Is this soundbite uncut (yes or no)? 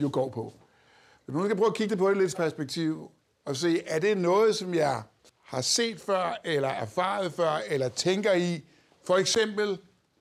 no